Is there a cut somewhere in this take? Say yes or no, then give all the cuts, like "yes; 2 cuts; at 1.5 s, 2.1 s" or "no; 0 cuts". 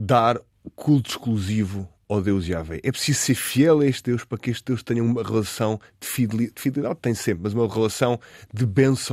no; 0 cuts